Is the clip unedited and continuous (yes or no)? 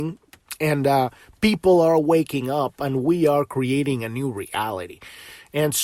yes